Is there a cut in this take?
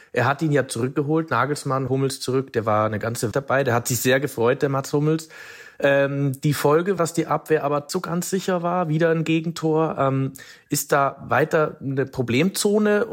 yes; 4 cuts; at 1.9 s, 3.3 s, 7.0 s, 7.9 s

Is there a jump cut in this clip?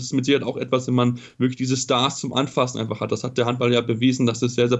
no; 0 cuts

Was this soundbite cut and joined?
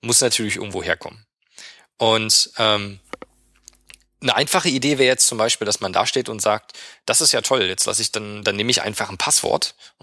no; 0 cuts

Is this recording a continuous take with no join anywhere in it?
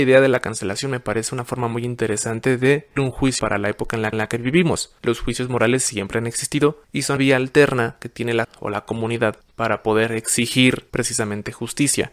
no; 9 cuts; at 3.0 s, 3.4 s, 4.1 s, 5.0 s, 6.8 s, 7.2 s, 8.4 s, 9.4 s, 10.9 s

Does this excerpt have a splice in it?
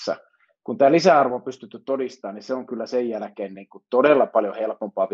no; 0 cuts

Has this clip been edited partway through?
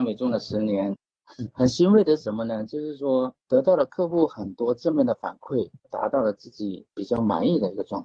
yes; 2 cuts; at 3.4 s, 5.8 s

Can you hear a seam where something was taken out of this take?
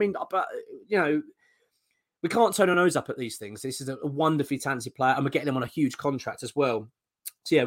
no; 0 cuts

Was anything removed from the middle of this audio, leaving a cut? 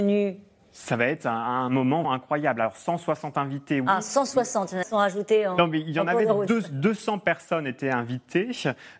yes; 2 cuts; at 2.0 s, 4.8 s

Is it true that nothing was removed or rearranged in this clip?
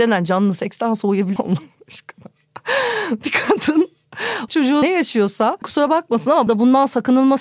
no; 5 cuts; at 1.4 s, 4.5 s, 4.8 s, 5.6 s, 6.5 s

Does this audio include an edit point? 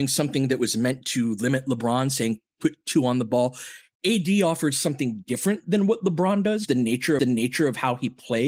yes; 2 cuts; at 6.7 s, 7.2 s

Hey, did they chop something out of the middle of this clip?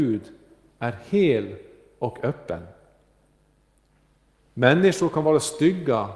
no; 0 cuts

